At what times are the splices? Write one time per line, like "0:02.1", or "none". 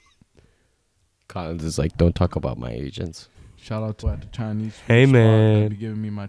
0:04.0